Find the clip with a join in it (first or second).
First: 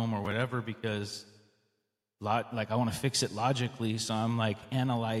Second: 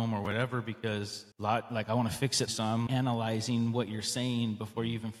second